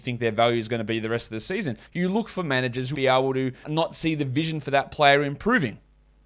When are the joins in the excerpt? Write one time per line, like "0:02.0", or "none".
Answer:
0:01.9
0:02.9
0:03.6

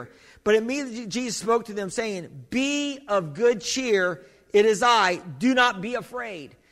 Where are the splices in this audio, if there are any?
none

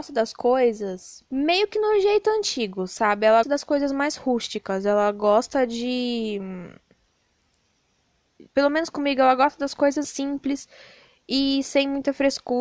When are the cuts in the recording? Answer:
0:01.3
0:03.4
0:08.5
0:10.0

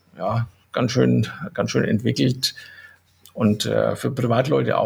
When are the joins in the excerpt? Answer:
none

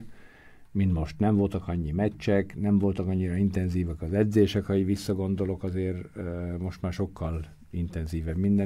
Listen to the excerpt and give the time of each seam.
none

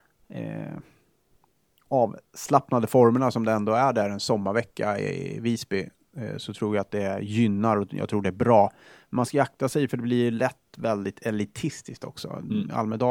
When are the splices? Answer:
none

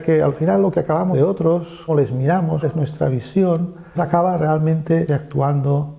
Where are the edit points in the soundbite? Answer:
0:01.1
0:01.9
0:02.6
0:04.0
0:05.1

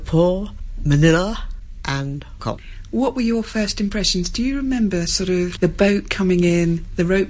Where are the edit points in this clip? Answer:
0:02.4
0:05.6

